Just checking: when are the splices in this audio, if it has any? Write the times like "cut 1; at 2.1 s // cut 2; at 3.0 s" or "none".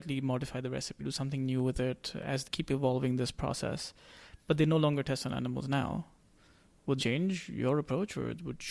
cut 1; at 1.0 s // cut 2; at 2.4 s // cut 3; at 7.0 s